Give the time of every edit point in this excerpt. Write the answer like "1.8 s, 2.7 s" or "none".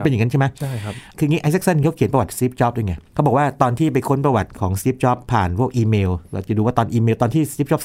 none